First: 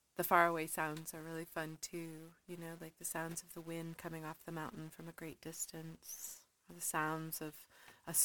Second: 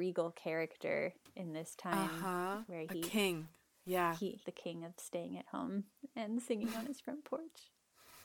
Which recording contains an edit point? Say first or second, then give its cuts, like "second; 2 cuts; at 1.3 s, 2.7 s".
second; 1 cut; at 4.4 s